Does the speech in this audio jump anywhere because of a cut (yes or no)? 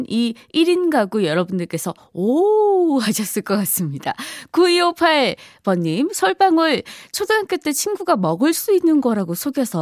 no